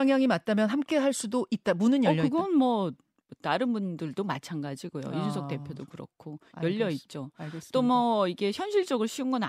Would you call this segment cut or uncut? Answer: uncut